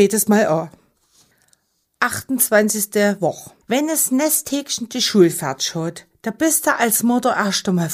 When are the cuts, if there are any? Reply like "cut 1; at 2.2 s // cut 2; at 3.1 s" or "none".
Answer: cut 1; at 3.6 s

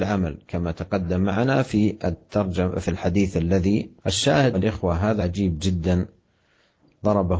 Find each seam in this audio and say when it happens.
cut 1; at 2.8 s // cut 2; at 4.0 s // cut 3; at 4.5 s // cut 4; at 5.2 s

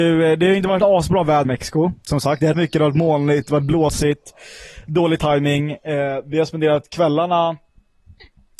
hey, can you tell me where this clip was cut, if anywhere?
cut 1; at 1.4 s // cut 2; at 2.5 s

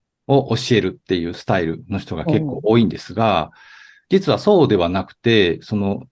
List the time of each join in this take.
none

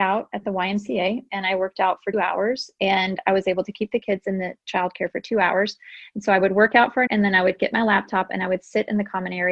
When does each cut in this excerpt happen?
cut 1; at 2.1 s // cut 2; at 7.1 s

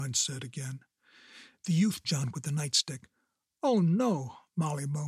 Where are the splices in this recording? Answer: cut 1; at 2.0 s

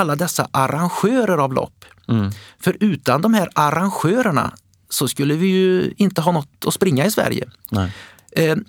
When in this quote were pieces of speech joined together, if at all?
none

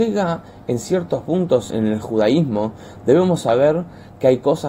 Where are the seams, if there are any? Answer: cut 1; at 1.7 s

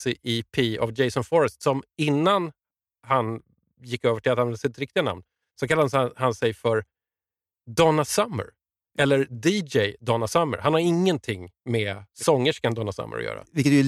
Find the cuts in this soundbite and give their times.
none

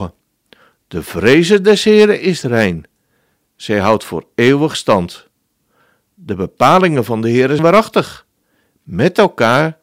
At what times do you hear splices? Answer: cut 1; at 7.6 s

